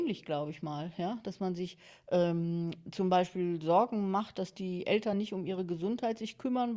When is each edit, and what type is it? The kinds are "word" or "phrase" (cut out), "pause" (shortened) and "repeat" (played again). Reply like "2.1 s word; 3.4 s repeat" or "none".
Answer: none